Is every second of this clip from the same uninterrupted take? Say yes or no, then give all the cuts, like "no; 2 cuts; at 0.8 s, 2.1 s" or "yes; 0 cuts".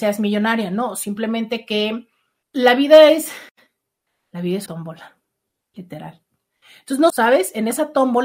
no; 2 cuts; at 4.7 s, 7.1 s